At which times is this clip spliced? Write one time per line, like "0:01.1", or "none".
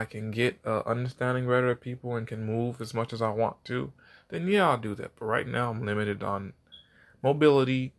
none